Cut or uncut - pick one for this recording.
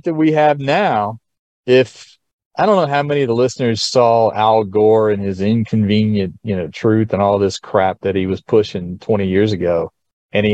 uncut